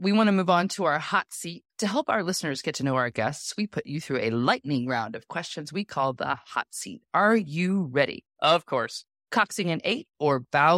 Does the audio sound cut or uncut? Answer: cut